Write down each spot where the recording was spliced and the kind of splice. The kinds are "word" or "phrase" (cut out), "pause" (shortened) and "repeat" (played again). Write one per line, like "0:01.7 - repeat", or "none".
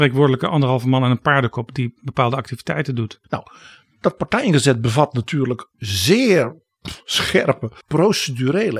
0:03.2 - pause
0:05.7 - pause
0:07.8 - pause